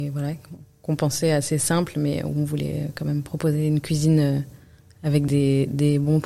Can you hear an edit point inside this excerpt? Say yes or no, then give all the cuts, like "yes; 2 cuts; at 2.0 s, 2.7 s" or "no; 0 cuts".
no; 0 cuts